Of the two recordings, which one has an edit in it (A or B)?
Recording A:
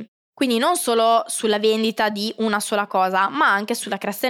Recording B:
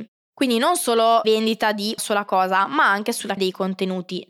B